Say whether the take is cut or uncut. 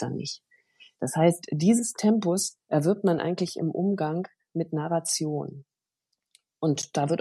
uncut